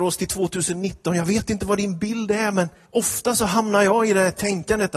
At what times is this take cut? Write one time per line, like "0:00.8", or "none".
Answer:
0:02.9